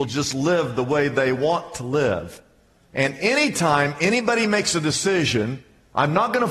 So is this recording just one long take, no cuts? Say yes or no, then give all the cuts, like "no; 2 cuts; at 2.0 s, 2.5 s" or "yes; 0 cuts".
yes; 0 cuts